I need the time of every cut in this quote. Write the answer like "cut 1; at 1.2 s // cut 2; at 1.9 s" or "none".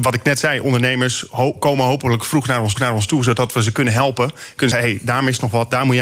cut 1; at 2.7 s // cut 2; at 4.7 s